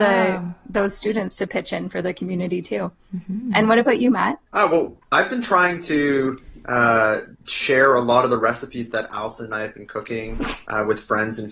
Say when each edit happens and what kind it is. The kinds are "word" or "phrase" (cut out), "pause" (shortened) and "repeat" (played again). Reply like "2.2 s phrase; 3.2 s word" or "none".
4.5 s pause; 7.3 s pause